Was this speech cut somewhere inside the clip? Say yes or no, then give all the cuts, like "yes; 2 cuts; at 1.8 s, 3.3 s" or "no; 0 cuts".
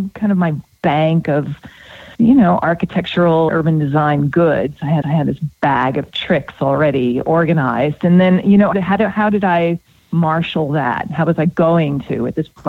yes; 4 cuts; at 2.1 s, 3.5 s, 5.0 s, 8.7 s